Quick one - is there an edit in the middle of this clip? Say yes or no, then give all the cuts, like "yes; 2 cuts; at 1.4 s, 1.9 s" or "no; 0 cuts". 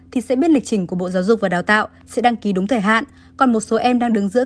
no; 0 cuts